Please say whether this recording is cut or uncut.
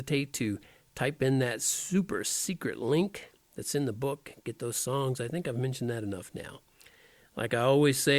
uncut